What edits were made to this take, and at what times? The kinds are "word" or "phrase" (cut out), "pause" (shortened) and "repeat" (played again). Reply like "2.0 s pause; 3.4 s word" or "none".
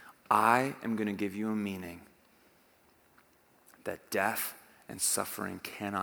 none